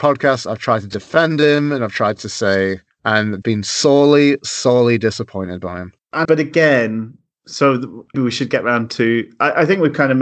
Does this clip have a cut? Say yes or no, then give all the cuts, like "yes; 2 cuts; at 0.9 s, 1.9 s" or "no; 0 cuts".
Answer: yes; 3 cuts; at 3.4 s, 6.2 s, 8.1 s